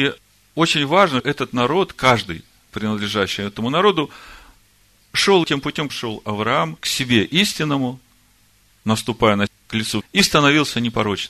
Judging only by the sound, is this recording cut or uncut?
cut